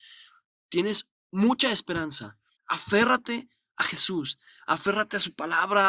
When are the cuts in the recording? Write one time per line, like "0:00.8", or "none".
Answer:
0:01.2
0:02.5